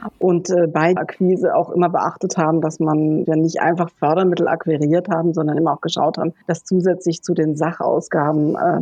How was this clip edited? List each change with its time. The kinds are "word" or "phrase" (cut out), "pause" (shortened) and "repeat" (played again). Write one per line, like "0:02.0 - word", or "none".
0:01.0 - word
0:03.3 - word
0:06.4 - pause